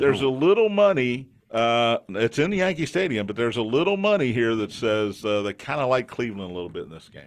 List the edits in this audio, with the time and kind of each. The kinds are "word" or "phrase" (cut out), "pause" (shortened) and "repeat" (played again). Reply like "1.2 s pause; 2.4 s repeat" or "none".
1.4 s pause

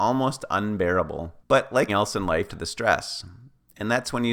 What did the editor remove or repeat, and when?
1.4 s pause; 1.9 s word; 2.5 s phrase

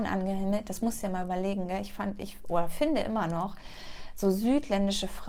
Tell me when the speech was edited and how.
none

